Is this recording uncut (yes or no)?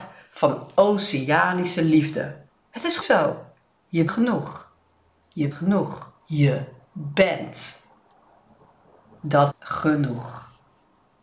no